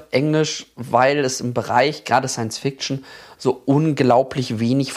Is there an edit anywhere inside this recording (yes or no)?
no